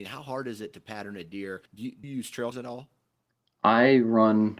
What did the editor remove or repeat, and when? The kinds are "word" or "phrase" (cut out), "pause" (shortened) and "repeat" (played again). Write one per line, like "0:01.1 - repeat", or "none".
0:01.7 - pause
0:02.0 - word
0:02.5 - word